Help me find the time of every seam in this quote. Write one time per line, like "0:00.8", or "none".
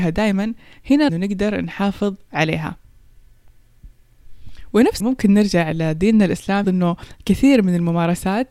0:01.1
0:05.0
0:06.6